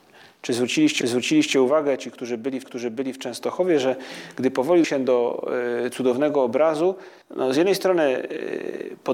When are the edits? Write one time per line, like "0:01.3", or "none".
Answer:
0:01.0
0:02.6
0:04.8
0:07.2